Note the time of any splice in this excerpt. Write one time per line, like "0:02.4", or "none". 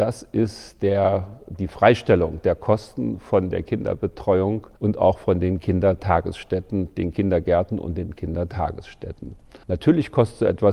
0:04.8
0:09.6